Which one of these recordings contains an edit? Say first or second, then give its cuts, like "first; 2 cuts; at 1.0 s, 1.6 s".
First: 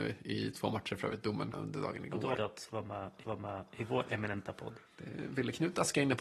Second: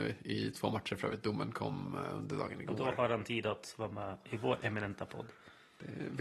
first; 4 cuts; at 1.5 s, 2.4 s, 3.2 s, 4.9 s